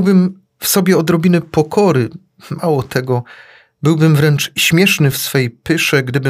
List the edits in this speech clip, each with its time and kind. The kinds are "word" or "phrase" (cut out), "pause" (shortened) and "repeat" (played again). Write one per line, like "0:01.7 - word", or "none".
none